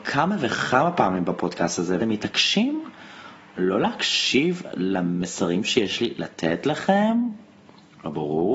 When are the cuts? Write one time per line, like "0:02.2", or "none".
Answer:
0:02.0